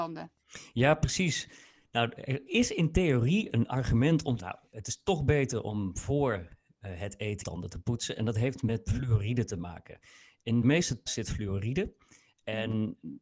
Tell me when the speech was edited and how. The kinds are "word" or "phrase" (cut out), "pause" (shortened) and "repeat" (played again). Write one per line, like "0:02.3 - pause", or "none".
0:02.5 - word
0:04.4 - word
0:07.4 - word
0:08.9 - word
0:10.6 - word
0:11.1 - word